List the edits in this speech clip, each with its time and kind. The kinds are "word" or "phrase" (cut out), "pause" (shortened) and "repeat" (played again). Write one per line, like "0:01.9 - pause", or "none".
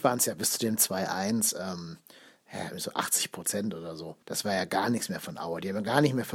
0:04.2 - pause